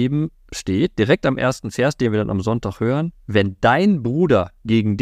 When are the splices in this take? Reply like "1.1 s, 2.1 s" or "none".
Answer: 3.2 s